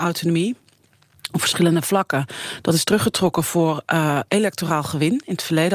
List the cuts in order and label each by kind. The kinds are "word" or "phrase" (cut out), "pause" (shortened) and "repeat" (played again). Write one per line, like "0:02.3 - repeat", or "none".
none